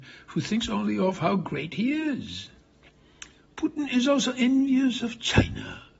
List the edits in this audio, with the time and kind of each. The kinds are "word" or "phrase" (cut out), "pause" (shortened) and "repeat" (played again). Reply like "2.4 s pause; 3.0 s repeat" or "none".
none